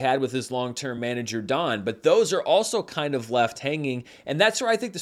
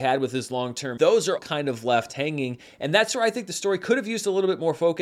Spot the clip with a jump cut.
second; 2 cuts; at 1.0 s, 1.4 s

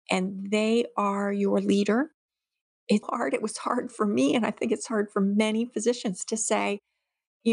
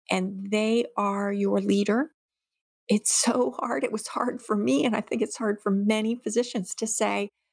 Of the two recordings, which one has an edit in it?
first; 1 cut; at 3.0 s

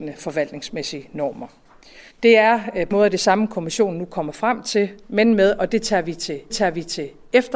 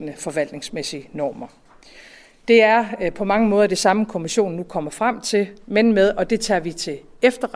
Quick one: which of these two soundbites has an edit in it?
first; 3 cuts; at 2.1 s, 2.9 s, 6.5 s

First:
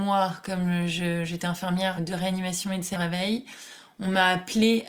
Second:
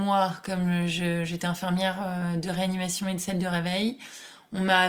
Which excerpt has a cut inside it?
first; 2 cuts; at 2.0 s, 2.9 s

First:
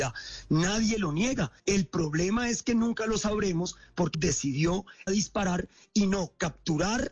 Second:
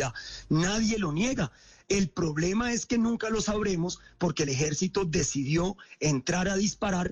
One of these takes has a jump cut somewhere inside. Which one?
first; 3 cuts; at 1.6 s, 4.1 s, 5.1 s

